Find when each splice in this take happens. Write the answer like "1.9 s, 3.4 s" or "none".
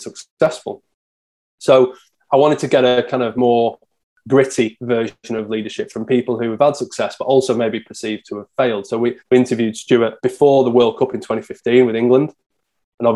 9.2 s, 10.2 s